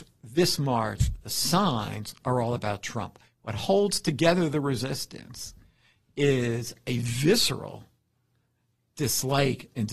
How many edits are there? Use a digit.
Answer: 0